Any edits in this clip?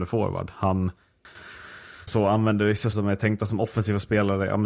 yes; 2 cuts; at 2.1 s, 2.9 s

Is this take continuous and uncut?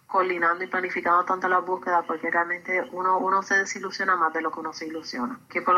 yes; 0 cuts

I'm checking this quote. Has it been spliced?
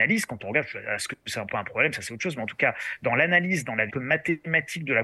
yes; 2 cuts; at 1.5 s, 3.9 s

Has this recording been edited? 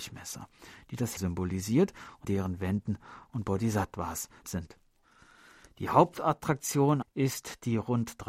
yes; 5 cuts; at 1.2 s, 2.2 s, 3.2 s, 4.4 s, 7.0 s

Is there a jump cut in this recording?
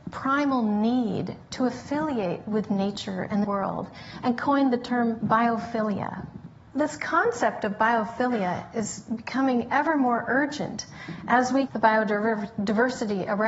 yes; 2 cuts; at 3.4 s, 11.7 s

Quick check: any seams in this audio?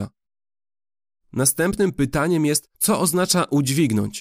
yes; 1 cut; at 2.7 s

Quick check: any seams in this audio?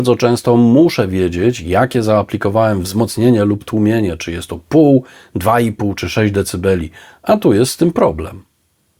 no; 0 cuts

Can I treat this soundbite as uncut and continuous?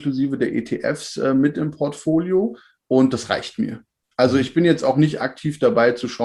yes; 0 cuts

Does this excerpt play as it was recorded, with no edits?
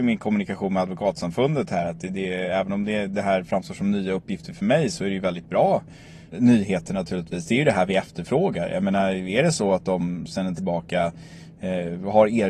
no; 2 cuts; at 6.3 s, 10.6 s

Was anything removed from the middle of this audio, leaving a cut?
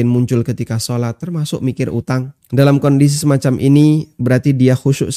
yes; 1 cut; at 2.4 s

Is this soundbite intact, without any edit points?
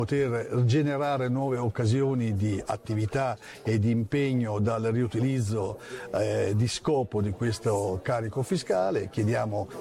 yes; 0 cuts

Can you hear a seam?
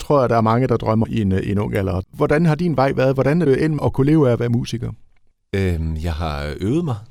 yes; 3 cuts; at 1.0 s, 3.5 s, 3.8 s

